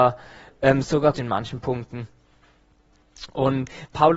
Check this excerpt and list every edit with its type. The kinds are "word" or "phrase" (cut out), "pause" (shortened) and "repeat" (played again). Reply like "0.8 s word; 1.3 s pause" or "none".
1.1 s word